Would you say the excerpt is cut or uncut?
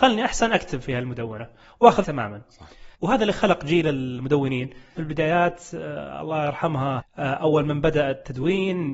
cut